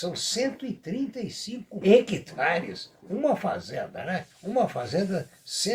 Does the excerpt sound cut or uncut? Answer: cut